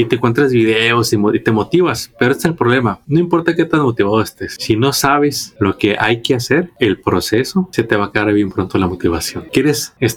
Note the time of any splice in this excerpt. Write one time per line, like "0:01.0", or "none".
none